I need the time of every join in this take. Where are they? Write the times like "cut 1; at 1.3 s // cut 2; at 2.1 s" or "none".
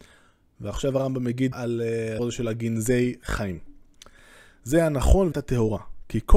cut 1; at 1.5 s // cut 2; at 2.2 s // cut 3; at 5.3 s